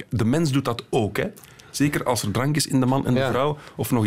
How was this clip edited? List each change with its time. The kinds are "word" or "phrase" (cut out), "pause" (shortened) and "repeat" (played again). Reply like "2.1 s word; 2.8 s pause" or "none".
none